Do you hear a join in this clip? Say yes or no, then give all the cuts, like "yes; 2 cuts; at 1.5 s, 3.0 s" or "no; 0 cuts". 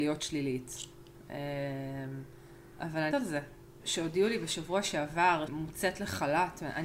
yes; 2 cuts; at 3.1 s, 5.5 s